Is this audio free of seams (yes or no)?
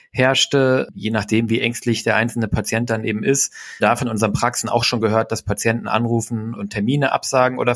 no